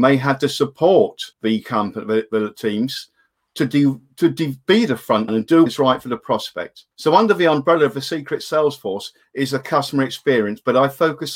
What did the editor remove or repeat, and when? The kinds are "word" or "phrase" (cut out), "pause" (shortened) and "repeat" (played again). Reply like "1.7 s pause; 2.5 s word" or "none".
1.3 s pause; 5.3 s word; 5.7 s word; 6.9 s pause